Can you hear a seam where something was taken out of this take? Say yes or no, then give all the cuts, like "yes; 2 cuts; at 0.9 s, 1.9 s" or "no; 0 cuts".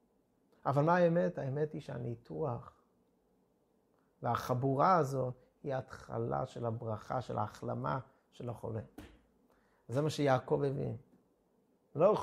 no; 0 cuts